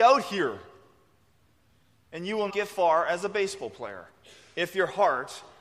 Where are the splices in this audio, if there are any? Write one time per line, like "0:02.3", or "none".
0:02.5